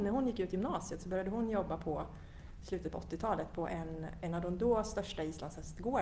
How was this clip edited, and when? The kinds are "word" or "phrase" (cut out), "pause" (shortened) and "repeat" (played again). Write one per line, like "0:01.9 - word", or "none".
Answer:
none